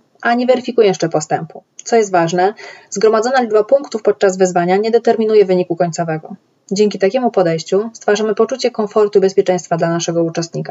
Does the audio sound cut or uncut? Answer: uncut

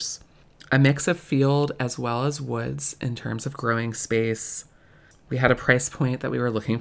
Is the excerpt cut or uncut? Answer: uncut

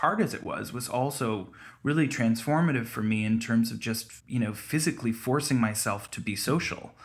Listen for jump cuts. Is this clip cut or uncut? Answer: cut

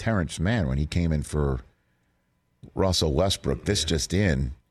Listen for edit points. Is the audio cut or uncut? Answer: uncut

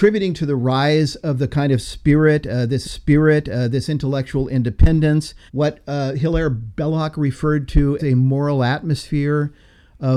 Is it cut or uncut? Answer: cut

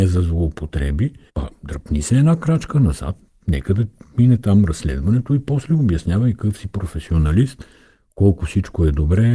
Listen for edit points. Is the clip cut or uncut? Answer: uncut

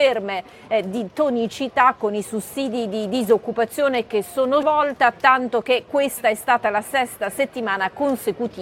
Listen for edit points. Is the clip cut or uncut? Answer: cut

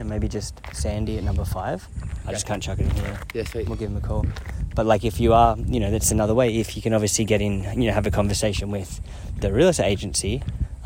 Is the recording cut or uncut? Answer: uncut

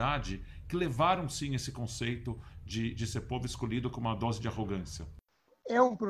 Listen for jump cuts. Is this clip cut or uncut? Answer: uncut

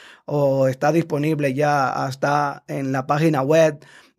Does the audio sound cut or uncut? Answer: uncut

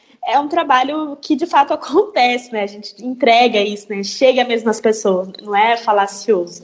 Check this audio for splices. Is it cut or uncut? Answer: uncut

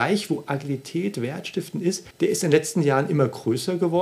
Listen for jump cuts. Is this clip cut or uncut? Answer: cut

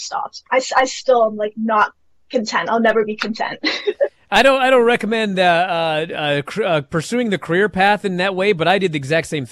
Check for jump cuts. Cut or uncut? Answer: uncut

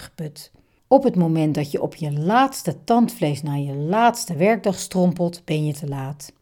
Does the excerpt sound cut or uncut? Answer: uncut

